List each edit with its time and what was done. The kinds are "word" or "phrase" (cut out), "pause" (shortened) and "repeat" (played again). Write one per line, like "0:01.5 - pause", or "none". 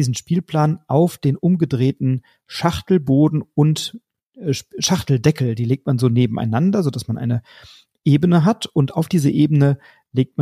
none